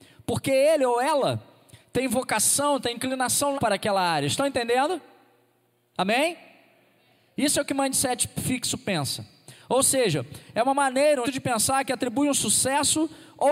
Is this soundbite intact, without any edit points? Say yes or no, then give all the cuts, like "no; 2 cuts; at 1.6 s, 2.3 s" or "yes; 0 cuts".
no; 2 cuts; at 3.6 s, 11.2 s